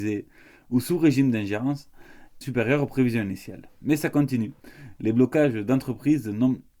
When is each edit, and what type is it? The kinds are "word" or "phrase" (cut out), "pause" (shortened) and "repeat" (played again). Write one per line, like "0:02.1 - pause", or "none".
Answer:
0:02.4 - phrase